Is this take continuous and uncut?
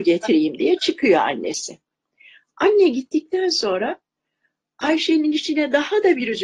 yes; 0 cuts

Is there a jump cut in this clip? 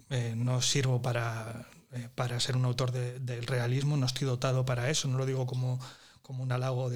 no; 0 cuts

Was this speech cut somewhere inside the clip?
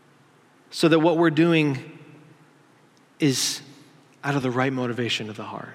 no; 0 cuts

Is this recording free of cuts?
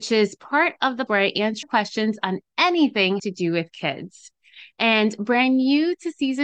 no; 3 cuts; at 1.1 s, 1.6 s, 3.2 s

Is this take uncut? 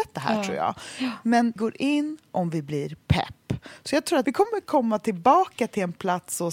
no; 2 cuts; at 1.6 s, 4.2 s

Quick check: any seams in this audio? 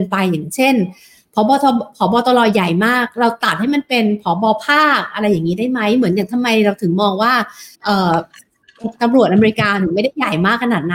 yes; 1 cut; at 7.7 s

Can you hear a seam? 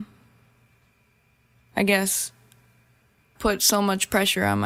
yes; 1 cut; at 3.4 s

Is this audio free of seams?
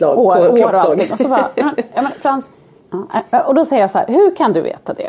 yes; 0 cuts

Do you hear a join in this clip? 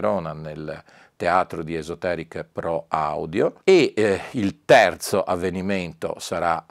yes; 1 cut; at 3.6 s

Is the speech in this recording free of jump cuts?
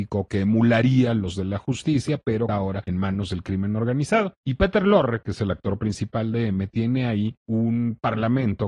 no; 1 cut; at 2.5 s

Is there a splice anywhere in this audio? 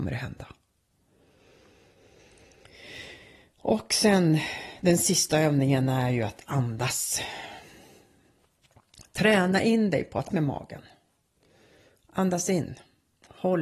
yes; 1 cut; at 10.3 s

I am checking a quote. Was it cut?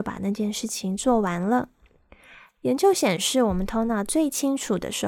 no; 0 cuts

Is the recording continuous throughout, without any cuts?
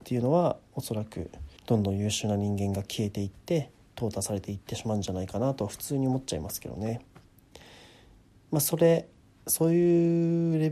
no; 1 cut; at 1.6 s

